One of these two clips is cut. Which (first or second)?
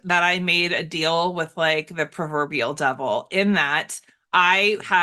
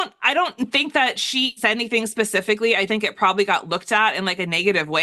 second